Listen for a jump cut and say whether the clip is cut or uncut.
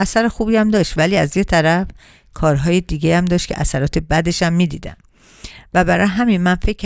uncut